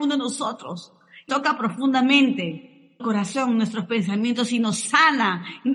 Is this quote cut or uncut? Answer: cut